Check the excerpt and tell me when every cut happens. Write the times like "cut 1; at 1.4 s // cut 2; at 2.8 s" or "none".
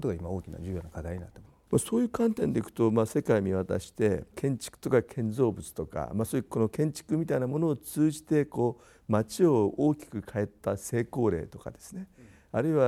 cut 1; at 4.3 s